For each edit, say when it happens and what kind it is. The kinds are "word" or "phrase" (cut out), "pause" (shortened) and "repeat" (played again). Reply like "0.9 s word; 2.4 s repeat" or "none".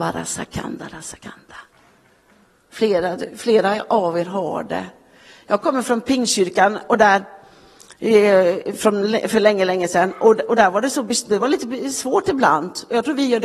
none

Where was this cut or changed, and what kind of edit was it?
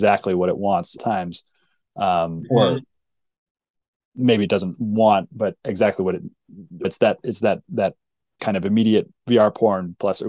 1.0 s phrase; 6.8 s phrase; 8.4 s word

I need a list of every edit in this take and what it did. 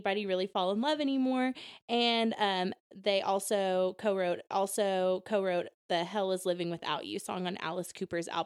4.5 s repeat

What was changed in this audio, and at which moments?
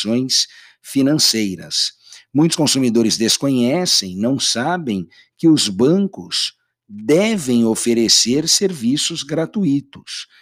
none

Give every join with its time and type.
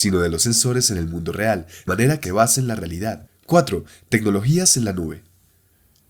1.9 s word; 2.2 s word

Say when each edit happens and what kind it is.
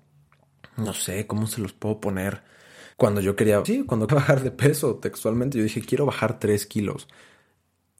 2.9 s pause; 3.6 s word; 4.1 s word

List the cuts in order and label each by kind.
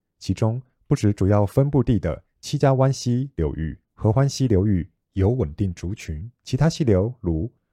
3.8 s pause; 6.3 s pause

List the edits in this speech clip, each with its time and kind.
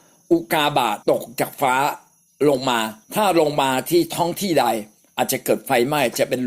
1.0 s pause; 3.0 s pause

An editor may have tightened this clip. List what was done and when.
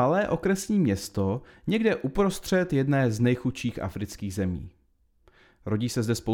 none

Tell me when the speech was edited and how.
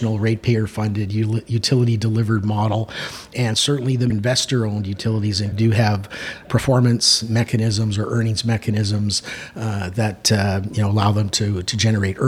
4.1 s word; 5.5 s word; 6.4 s word

